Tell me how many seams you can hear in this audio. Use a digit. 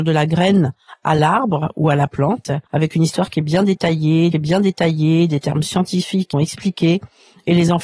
3